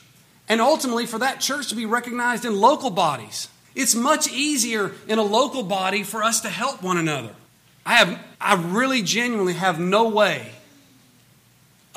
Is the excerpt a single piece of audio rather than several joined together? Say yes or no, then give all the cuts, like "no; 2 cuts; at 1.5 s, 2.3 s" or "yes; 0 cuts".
no; 3 cuts; at 3.6 s, 7.5 s, 8.4 s